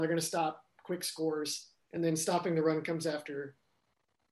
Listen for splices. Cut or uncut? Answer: uncut